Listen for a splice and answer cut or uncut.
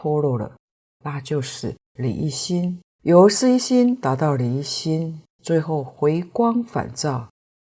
cut